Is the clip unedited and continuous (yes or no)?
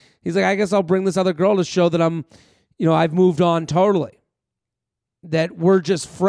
yes